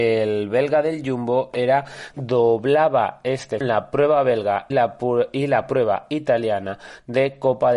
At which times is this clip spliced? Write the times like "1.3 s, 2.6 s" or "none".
2.1 s, 3.6 s, 4.7 s